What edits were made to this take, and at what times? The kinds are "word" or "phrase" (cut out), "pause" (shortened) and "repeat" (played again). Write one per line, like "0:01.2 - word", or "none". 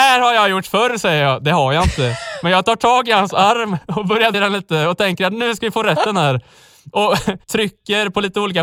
0:04.3 - word
0:07.4 - pause